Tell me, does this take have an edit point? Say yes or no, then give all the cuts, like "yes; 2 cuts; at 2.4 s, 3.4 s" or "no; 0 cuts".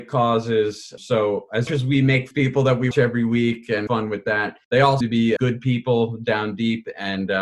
yes; 8 cuts; at 1.0 s, 1.7 s, 2.3 s, 2.9 s, 3.9 s, 4.6 s, 5.0 s, 5.4 s